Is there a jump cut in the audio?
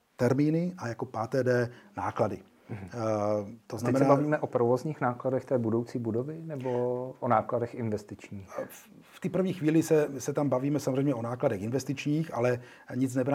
no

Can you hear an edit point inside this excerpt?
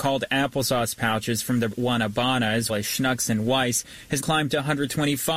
yes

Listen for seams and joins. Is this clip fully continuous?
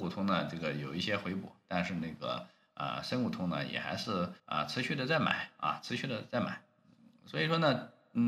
no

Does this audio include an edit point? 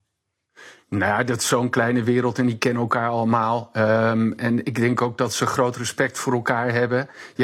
no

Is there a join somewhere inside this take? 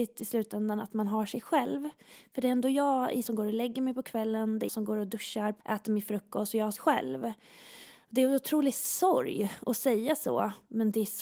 yes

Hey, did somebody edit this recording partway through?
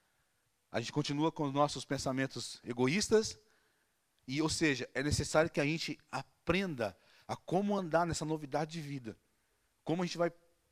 no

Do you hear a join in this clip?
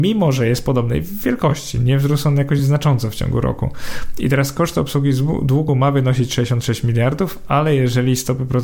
no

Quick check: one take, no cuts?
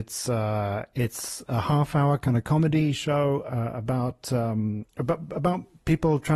no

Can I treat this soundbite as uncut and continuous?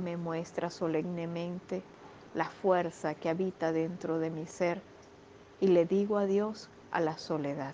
yes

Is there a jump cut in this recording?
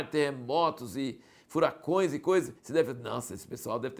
yes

